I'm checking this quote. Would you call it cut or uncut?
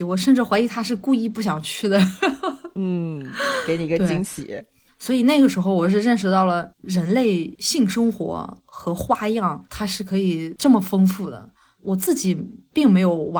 uncut